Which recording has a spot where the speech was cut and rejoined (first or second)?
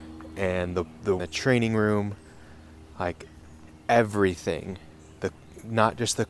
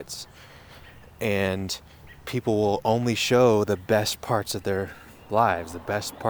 first